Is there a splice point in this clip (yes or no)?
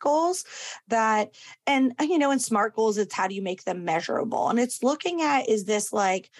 no